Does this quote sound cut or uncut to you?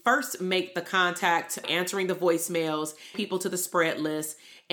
cut